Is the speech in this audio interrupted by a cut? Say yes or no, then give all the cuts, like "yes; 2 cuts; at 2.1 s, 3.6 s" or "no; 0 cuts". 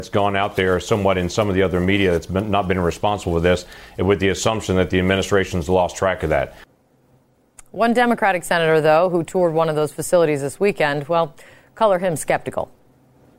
no; 0 cuts